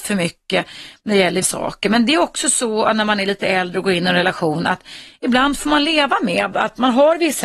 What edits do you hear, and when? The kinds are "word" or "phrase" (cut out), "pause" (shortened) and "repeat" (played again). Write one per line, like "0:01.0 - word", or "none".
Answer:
0:01.4 - word